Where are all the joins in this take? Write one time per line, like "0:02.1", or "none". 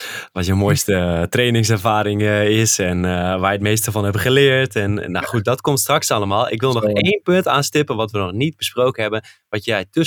none